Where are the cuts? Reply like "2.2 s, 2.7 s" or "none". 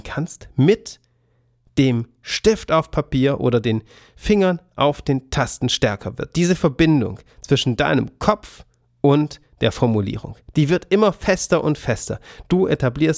none